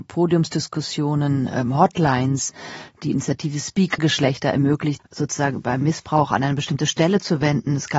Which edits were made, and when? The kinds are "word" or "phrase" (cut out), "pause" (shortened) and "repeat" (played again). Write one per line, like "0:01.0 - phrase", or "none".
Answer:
0:04.0 - phrase
0:05.0 - word